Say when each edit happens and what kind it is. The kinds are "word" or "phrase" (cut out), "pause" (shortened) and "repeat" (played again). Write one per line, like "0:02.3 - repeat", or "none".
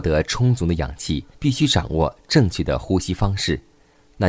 0:01.3 - pause